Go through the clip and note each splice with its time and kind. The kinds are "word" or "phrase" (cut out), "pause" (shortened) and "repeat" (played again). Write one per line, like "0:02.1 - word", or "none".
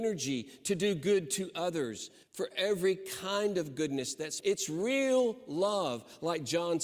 0:02.2 - pause
0:04.4 - phrase